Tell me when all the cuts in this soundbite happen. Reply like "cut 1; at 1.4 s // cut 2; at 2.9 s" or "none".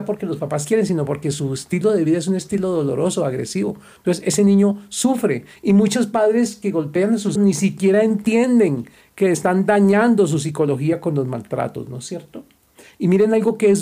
cut 1; at 7.4 s